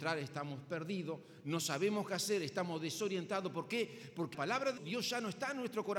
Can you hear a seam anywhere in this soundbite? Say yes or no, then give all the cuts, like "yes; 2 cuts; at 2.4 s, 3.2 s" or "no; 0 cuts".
yes; 2 cuts; at 4.3 s, 4.8 s